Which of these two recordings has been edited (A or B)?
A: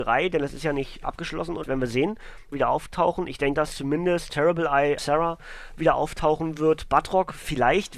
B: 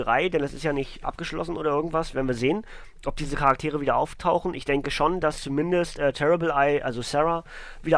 A